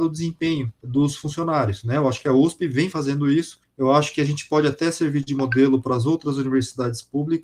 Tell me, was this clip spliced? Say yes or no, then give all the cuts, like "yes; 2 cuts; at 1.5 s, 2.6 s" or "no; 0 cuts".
no; 0 cuts